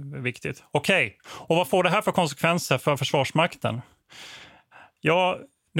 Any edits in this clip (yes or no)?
no